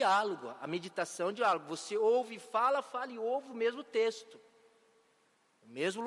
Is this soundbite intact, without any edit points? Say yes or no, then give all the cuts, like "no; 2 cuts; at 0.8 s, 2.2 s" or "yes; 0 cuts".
yes; 0 cuts